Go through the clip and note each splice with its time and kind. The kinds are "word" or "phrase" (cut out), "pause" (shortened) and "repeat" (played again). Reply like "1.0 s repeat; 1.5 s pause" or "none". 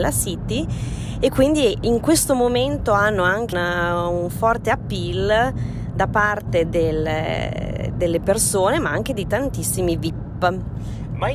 3.5 s word

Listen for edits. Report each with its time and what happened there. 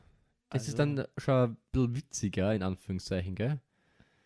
none

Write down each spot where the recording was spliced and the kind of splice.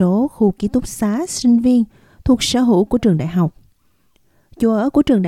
none

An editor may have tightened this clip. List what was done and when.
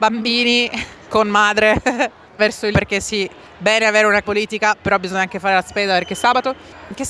2.4 s word; 2.7 s word; 4.2 s word

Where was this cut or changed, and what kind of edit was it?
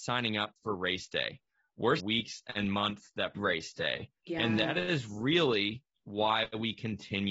2.0 s phrase; 3.3 s word; 4.2 s pause

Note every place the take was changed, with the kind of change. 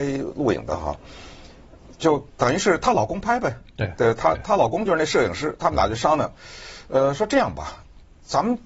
none

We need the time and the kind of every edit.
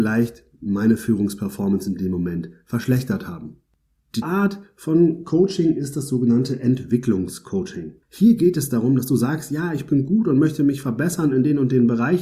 4.2 s word; 8.0 s pause

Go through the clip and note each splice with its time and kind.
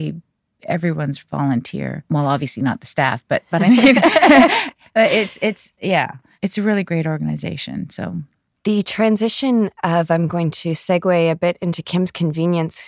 none

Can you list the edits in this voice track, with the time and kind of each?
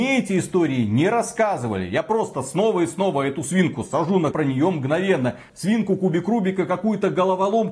4.3 s phrase

